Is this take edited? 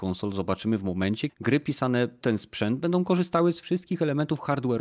yes; 2 cuts; at 1.3 s, 2.2 s

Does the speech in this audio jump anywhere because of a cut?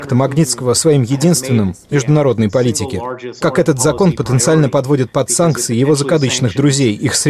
yes; 2 cuts; at 1.9 s, 3.4 s

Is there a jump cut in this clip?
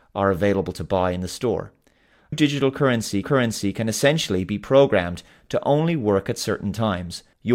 yes; 2 cuts; at 2.3 s, 3.2 s

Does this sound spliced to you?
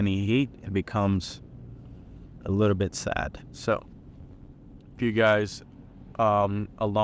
yes; 1 cut; at 5.0 s

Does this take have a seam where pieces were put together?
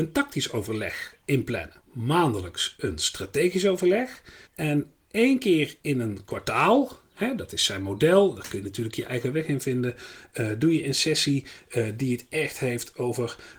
yes; 2 cuts; at 1.8 s, 4.4 s

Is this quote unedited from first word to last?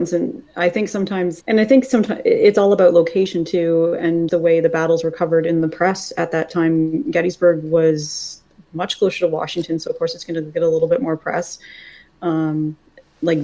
no; 2 cuts; at 1.4 s, 4.3 s

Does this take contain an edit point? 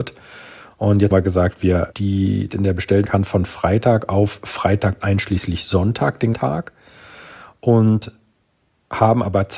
yes; 6 cuts; at 1.1 s, 1.9 s, 2.5 s, 3.1 s, 5.0 s, 6.3 s

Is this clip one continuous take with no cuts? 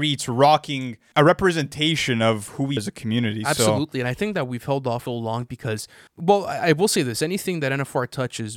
no; 4 cuts; at 1.1 s, 2.8 s, 5.1 s, 6.1 s

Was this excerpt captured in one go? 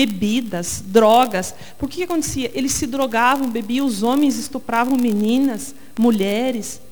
yes; 0 cuts

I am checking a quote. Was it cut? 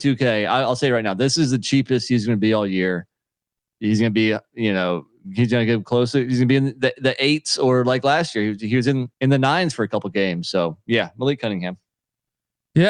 yes; 1 cut; at 9.1 s

